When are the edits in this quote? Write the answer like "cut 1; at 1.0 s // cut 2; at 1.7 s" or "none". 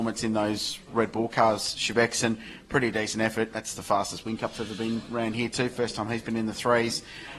none